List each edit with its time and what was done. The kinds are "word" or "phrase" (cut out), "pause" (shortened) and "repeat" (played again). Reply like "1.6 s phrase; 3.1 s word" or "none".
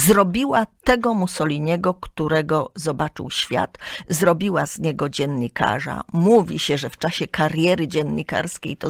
none